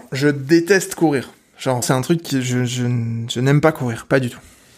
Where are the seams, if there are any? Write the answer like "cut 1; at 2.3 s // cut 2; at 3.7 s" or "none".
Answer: cut 1; at 1.8 s